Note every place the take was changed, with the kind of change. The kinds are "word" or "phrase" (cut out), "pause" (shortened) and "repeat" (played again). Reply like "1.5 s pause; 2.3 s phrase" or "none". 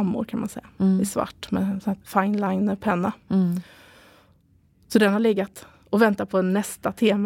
2.0 s word

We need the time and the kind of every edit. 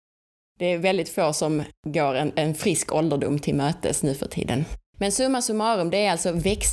1.8 s pause; 4.9 s pause

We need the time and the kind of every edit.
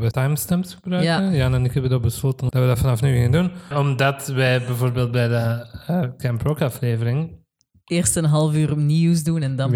none

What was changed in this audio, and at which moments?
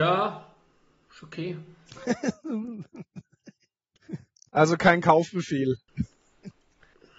none

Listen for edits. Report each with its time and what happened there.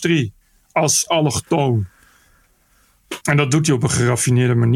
1.1 s word; 3.2 s pause

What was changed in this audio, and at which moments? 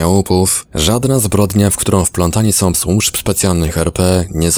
2.7 s word

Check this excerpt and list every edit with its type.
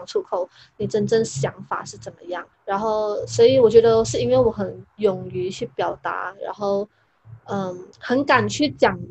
2.5 s pause; 7.9 s pause

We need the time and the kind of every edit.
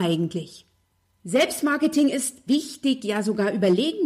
2.5 s word

